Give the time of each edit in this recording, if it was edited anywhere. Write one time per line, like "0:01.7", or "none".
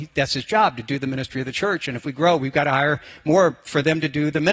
none

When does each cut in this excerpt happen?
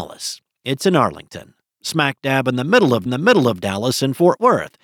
0:03.1

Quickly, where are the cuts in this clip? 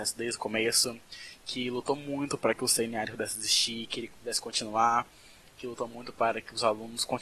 none

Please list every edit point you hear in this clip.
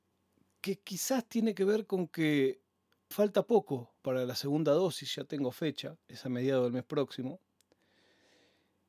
0:03.1
0:04.0
0:06.0

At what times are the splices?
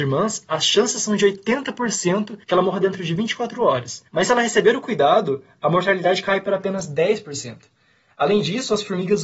0:02.4
0:04.1

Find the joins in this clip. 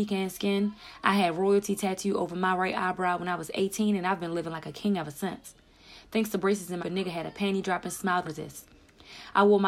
0:06.8
0:08.2

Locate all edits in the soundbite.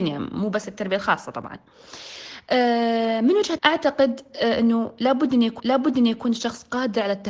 0:03.6
0:05.6

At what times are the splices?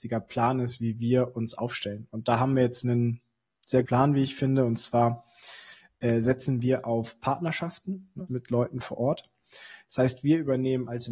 0:03.8
0:08.3

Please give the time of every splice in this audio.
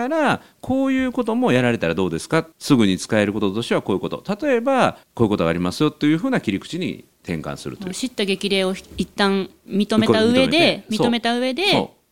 0:02.5
0:05.0
0:07.1

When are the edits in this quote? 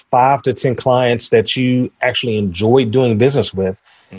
none

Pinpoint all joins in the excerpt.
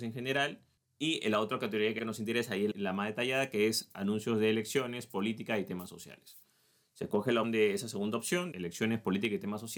0:02.0
0:07.4
0:08.5

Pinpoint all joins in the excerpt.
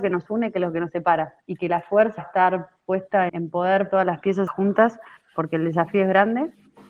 0:01.4
0:02.2
0:03.3
0:03.9
0:04.5

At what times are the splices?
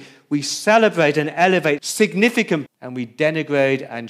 0:01.8
0:02.7

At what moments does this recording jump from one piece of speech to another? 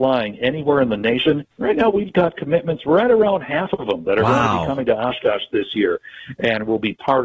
0:01.5

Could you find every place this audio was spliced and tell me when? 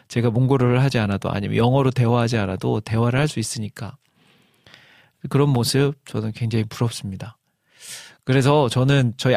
none

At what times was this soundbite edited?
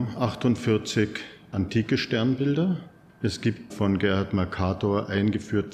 0:01.5
0:03.1
0:03.7

